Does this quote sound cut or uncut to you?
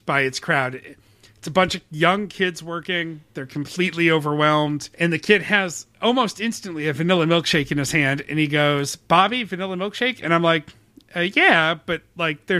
cut